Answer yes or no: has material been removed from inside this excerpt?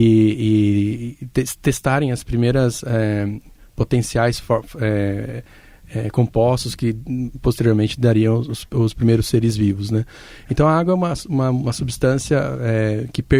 no